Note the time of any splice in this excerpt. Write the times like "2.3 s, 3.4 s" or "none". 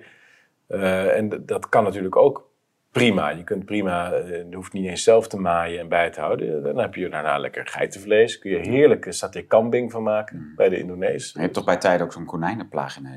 none